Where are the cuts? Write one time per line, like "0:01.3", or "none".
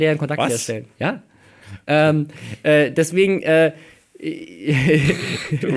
none